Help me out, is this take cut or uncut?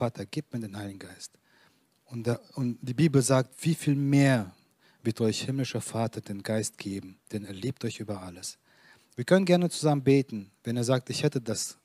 cut